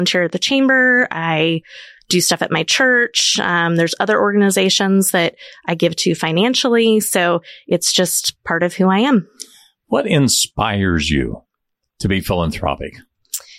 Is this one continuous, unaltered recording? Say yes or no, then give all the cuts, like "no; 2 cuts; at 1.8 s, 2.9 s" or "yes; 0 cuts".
yes; 0 cuts